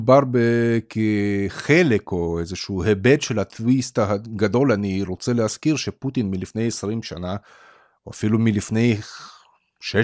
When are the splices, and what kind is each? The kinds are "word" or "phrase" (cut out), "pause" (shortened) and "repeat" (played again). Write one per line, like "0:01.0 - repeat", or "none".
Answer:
none